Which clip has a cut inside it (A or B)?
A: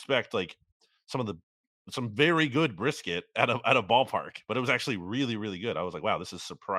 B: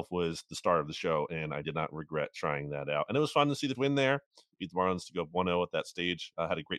B